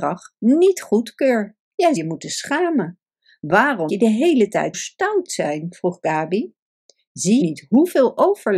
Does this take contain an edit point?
yes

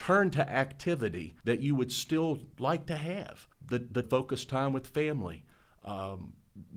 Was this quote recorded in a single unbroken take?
no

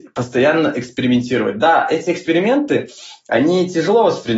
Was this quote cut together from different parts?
no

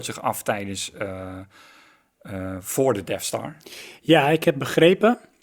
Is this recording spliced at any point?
no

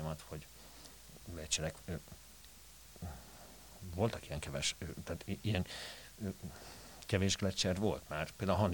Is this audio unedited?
yes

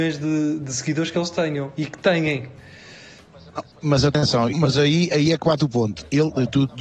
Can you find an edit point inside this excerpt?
yes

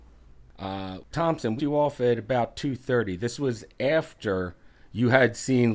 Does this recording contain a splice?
yes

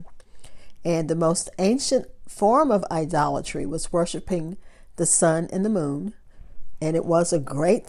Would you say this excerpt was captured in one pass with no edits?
yes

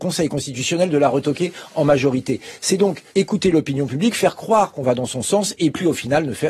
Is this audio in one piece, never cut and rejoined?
no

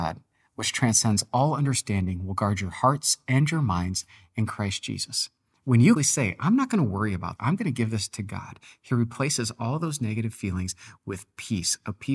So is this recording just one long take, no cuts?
no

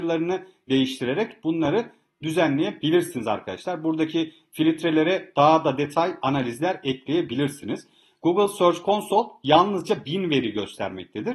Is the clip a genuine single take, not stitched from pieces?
yes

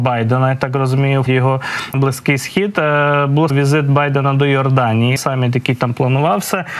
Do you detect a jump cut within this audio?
yes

